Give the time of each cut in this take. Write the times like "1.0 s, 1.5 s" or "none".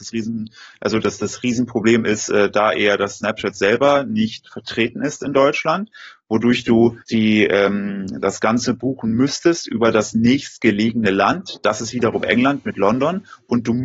7.0 s